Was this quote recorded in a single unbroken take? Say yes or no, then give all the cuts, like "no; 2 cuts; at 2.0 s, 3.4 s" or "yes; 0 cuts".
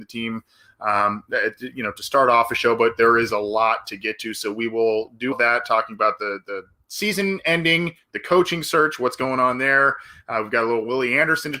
no; 1 cut; at 5.3 s